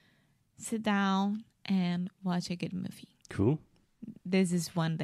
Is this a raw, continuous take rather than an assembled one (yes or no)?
no